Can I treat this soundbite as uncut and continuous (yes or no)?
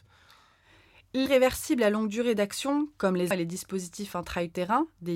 no